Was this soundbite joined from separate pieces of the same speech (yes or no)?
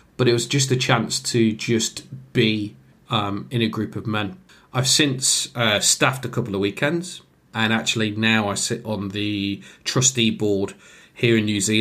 yes